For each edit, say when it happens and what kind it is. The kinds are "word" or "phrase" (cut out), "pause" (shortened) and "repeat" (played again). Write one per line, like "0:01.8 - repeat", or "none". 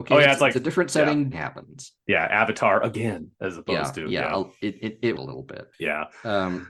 0:01.3 - phrase
0:05.2 - phrase
0:05.7 - pause